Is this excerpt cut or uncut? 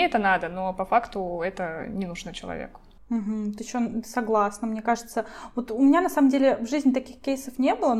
cut